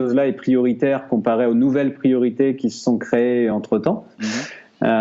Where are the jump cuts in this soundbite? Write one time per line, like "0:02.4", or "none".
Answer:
none